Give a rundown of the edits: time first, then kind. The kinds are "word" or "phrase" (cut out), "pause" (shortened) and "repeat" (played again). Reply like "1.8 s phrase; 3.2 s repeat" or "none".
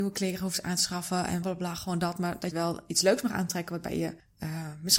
1.4 s word; 2.5 s word

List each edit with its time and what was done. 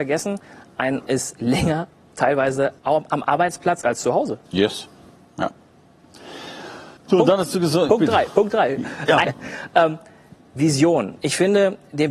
1.1 s word; 2.8 s pause; 4.5 s pause; 7.0 s pause; 7.9 s word; 9.2 s phrase

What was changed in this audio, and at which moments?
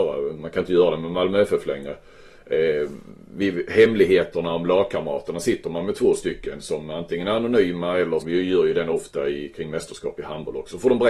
8.2 s word

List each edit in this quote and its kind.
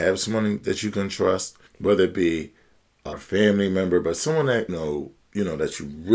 1.7 s pause; 3.1 s word; 4.7 s word; 5.2 s pause

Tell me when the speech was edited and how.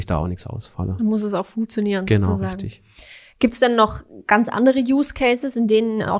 none

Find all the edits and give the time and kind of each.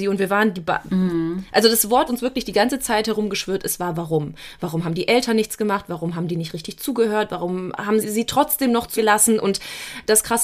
2.1 s word; 8.0 s word; 9.0 s word

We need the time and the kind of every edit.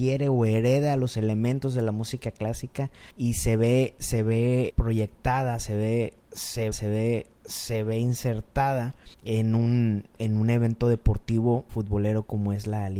3.1 s pause; 4.7 s word; 6.7 s repeat; 9.1 s pause; 11.7 s word

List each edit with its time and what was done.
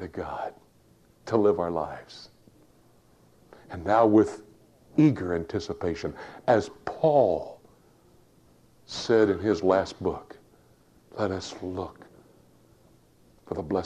none

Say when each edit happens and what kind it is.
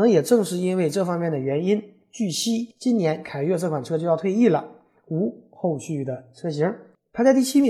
2.7 s pause

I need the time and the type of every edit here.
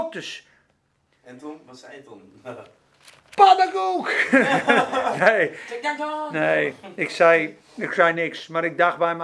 none

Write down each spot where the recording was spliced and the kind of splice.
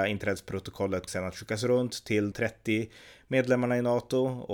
1.1 s word; 2.3 s word

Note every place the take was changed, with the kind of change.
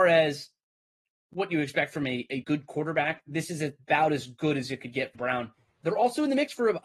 2.4 s word; 5.1 s word

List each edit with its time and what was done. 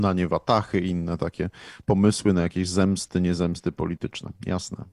none

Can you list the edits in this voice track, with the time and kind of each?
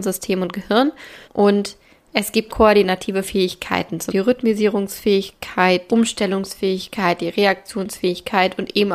1.2 s pause; 2.5 s word; 4.1 s word; 5.9 s word

